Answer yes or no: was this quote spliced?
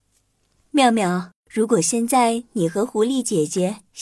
yes